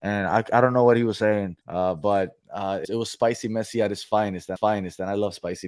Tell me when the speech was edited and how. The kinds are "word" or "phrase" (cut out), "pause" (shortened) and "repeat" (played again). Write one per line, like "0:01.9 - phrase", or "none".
0:01.6 - pause
0:02.4 - pause
0:02.8 - word
0:04.6 - repeat